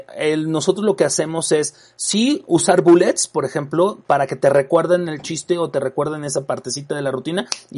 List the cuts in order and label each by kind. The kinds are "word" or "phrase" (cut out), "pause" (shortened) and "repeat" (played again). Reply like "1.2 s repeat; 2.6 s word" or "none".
none